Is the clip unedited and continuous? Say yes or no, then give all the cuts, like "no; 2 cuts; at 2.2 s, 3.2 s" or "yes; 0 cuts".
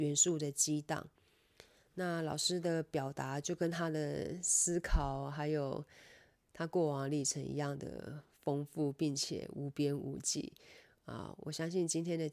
yes; 0 cuts